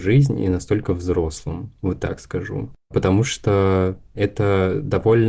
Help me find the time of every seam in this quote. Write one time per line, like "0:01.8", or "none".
none